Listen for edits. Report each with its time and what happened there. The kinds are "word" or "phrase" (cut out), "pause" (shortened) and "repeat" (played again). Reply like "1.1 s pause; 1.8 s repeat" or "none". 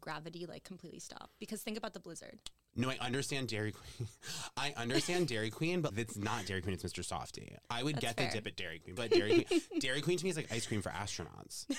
5.9 s word; 9.0 s word